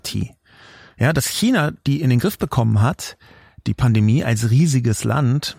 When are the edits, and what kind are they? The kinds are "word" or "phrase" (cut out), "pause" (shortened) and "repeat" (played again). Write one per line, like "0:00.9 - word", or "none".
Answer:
none